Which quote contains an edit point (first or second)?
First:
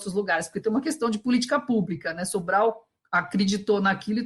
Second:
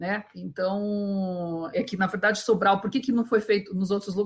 second